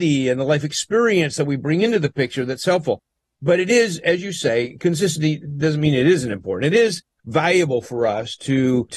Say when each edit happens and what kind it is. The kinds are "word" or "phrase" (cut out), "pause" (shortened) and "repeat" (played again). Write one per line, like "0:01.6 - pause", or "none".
none